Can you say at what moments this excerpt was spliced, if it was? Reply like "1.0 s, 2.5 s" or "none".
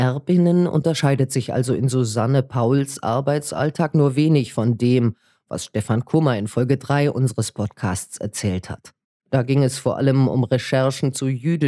none